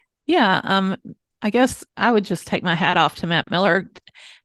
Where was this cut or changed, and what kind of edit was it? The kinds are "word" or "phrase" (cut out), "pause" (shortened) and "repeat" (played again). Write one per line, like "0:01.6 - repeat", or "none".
none

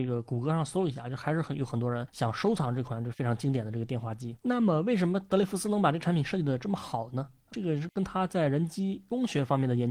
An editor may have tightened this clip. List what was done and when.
0:04.4 - pause

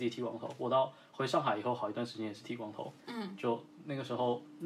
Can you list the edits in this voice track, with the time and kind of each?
0:03.0 - pause

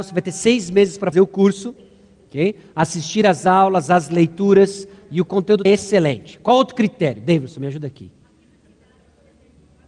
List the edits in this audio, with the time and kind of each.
0:01.1 - word
0:05.7 - word

